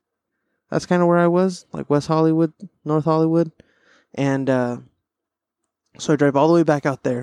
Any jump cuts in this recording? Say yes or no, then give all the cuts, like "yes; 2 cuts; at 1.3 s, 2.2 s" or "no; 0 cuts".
no; 0 cuts